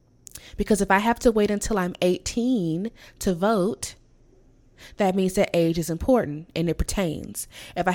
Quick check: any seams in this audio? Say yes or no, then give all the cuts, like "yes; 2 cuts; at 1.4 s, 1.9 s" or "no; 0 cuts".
no; 0 cuts